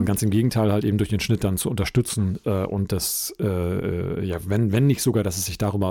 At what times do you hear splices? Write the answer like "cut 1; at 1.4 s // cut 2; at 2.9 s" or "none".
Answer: none